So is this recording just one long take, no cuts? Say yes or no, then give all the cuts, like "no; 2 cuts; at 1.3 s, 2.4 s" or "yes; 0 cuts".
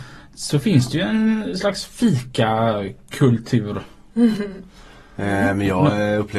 yes; 0 cuts